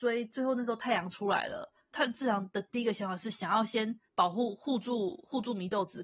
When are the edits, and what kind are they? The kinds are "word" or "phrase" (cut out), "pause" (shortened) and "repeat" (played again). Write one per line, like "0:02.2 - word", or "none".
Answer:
0:04.1 - pause